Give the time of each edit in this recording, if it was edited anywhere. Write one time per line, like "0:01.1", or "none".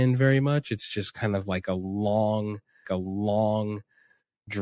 0:02.8